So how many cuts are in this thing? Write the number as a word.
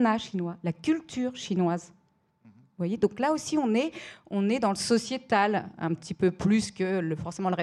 zero